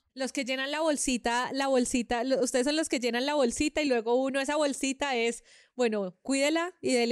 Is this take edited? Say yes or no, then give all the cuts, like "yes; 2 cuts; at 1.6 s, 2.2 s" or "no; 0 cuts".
no; 0 cuts